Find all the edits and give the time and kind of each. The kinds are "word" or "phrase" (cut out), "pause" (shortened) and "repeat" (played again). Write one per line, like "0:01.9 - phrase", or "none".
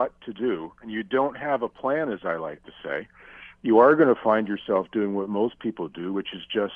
none